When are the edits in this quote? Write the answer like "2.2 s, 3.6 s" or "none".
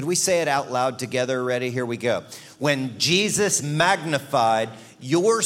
3.6 s